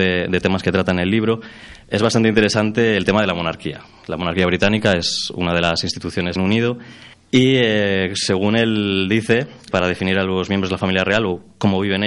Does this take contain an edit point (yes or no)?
yes